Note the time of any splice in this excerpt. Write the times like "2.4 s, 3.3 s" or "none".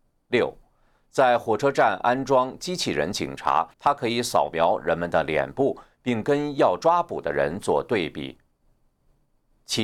3.7 s